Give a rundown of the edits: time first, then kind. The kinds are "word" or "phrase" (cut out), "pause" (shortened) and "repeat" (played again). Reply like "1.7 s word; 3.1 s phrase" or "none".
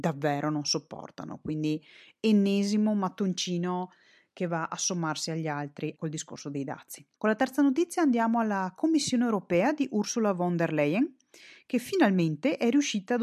5.9 s word; 7.1 s pause